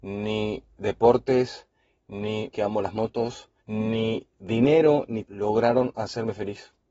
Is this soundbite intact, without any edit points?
no; 3 cuts; at 2.5 s, 3.6 s, 5.2 s

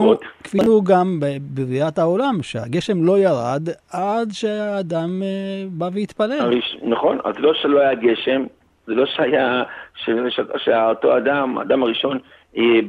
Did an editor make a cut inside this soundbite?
no; 0 cuts

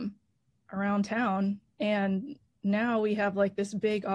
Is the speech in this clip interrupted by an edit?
no; 0 cuts

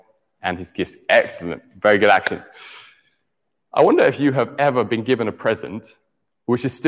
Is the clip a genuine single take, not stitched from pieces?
yes; 0 cuts

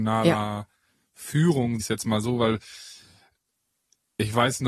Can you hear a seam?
yes; 1 cut; at 1.8 s

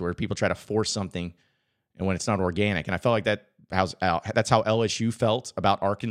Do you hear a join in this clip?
no; 0 cuts

